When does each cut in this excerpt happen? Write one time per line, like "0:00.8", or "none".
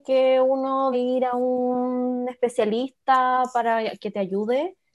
0:00.9

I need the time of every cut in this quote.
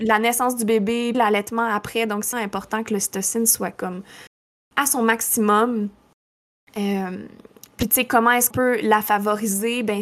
0:01.1
0:02.3
0:08.5

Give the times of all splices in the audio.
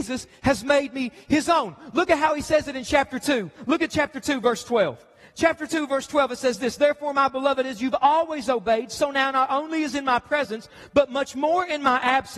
none

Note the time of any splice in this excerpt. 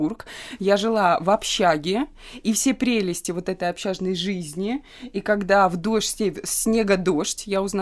none

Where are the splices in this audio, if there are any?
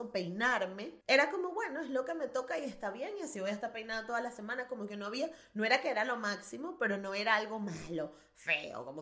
0:01.0

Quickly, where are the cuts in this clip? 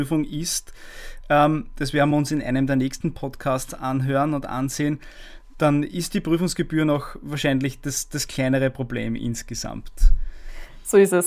none

